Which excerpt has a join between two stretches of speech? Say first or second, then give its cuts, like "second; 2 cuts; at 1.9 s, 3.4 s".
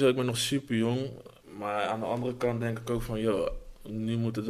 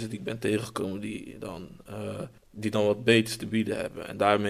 second; 1 cut; at 2.4 s